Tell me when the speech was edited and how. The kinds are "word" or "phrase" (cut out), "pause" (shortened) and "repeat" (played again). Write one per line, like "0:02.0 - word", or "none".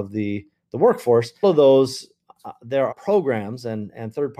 0:01.4 - word
0:02.9 - word